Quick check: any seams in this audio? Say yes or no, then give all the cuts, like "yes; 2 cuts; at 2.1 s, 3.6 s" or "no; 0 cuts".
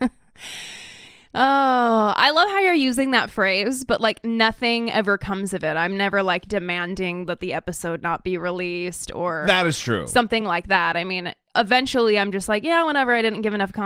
no; 0 cuts